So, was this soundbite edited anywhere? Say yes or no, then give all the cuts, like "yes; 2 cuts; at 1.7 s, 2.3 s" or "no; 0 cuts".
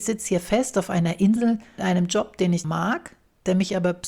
yes; 2 cuts; at 1.8 s, 2.6 s